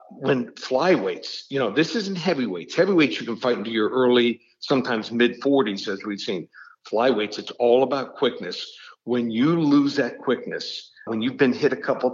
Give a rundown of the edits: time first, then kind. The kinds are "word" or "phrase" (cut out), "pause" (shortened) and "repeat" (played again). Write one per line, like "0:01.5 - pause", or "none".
0:11.1 - word